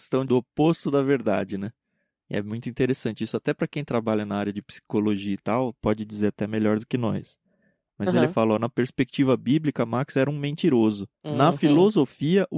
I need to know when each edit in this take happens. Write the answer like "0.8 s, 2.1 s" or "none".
11.1 s